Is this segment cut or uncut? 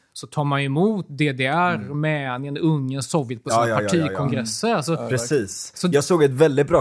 uncut